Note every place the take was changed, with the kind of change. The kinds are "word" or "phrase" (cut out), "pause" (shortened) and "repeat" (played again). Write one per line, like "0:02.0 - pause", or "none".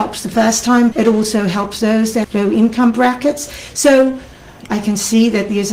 0:00.9 - word
0:02.2 - word
0:04.7 - phrase